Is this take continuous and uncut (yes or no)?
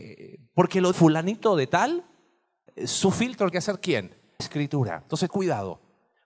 no